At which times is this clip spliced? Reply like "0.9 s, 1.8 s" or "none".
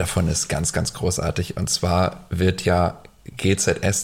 none

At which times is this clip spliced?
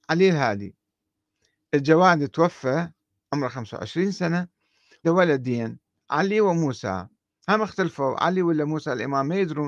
5.0 s

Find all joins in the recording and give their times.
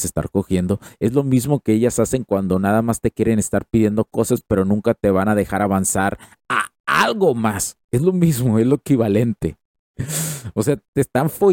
none

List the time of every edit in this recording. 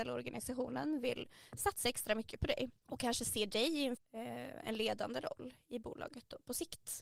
2.8 s, 4.0 s

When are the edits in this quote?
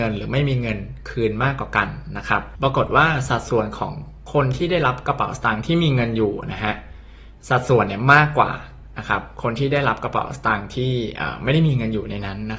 7.4 s

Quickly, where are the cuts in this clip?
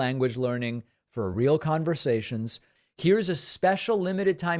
none

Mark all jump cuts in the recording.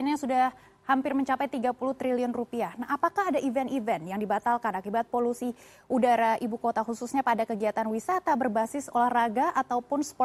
none

